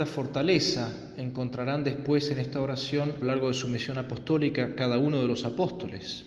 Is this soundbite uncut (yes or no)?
no